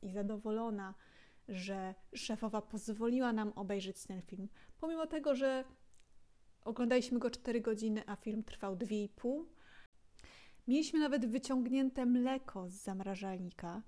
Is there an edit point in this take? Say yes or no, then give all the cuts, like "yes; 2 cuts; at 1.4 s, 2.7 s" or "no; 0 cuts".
no; 0 cuts